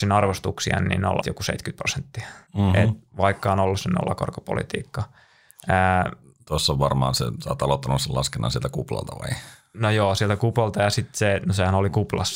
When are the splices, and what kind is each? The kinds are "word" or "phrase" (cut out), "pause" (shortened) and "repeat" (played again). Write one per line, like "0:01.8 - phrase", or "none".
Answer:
0:01.2 - word
0:02.5 - pause
0:06.5 - word